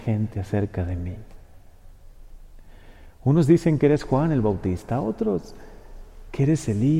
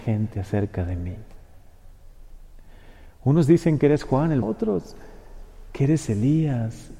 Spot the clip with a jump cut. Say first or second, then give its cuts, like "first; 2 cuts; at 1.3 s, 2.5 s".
second; 1 cut; at 4.4 s